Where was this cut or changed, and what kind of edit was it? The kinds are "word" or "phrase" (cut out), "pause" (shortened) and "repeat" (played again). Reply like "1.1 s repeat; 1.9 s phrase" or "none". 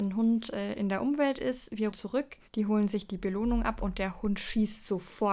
1.9 s word; 2.5 s pause